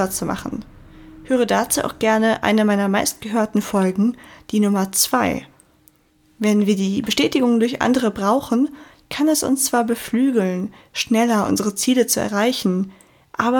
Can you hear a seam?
no; 0 cuts

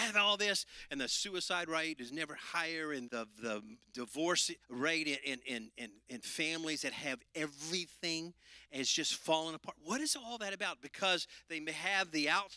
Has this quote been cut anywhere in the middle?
yes; 2 cuts; at 3.1 s, 4.6 s

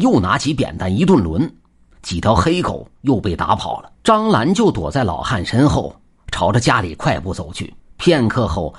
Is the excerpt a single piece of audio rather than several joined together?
no; 2 cuts; at 3.9 s, 7.8 s

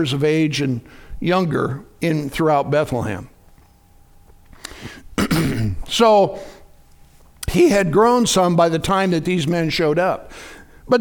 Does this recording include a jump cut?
no; 0 cuts

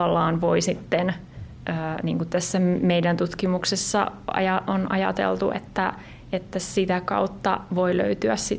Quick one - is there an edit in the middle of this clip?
no; 0 cuts

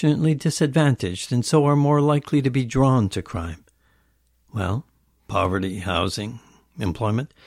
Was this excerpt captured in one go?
yes; 0 cuts

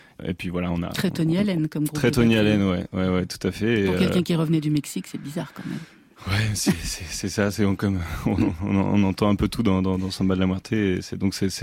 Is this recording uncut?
yes; 0 cuts

